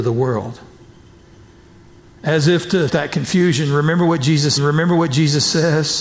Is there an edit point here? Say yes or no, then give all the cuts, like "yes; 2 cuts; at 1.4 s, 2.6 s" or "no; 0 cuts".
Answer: yes; 2 cuts; at 2.9 s, 4.6 s